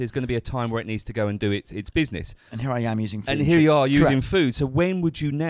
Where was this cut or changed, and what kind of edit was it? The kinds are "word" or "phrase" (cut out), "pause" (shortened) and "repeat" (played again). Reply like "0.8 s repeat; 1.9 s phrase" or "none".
none

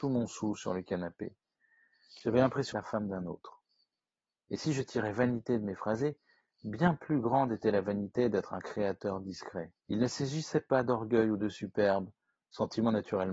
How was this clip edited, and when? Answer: 2.7 s phrase; 9.8 s pause

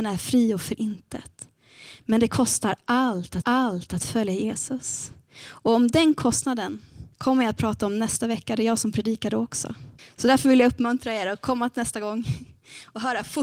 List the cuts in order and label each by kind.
3.4 s repeat; 7.1 s pause; 10.0 s pause

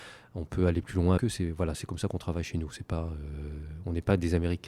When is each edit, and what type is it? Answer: 1.2 s word

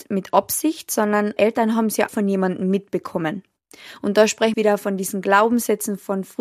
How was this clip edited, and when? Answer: 1.4 s word; 2.1 s word; 4.5 s phrase

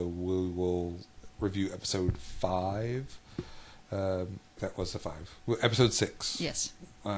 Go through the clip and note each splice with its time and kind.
4.6 s word

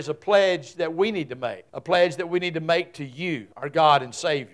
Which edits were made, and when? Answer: 1.7 s pause; 3.5 s pause

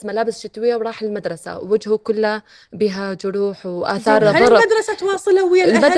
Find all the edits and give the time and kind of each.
none

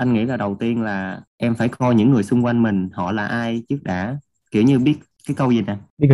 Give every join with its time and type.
none

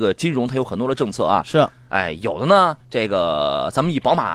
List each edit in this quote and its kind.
2.8 s pause

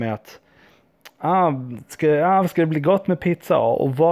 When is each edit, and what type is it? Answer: none

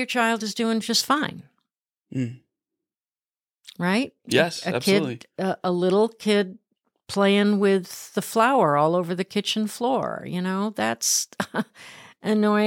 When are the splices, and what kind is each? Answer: none

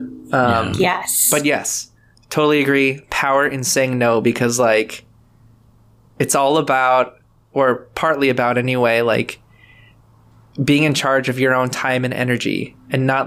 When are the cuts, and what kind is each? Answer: none

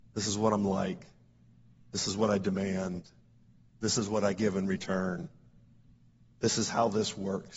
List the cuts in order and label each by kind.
none

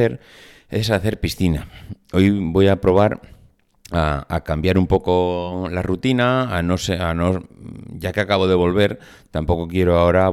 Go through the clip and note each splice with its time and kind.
none

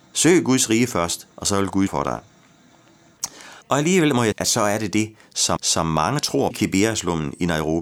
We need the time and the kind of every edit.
1.3 s pause; 1.9 s word; 3.6 s pause; 4.3 s word; 5.6 s repeat; 6.5 s phrase

